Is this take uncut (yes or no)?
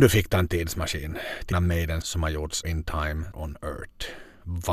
no